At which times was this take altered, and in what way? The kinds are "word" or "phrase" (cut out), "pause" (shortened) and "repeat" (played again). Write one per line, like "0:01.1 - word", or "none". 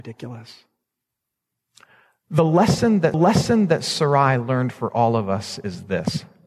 0:03.1 - repeat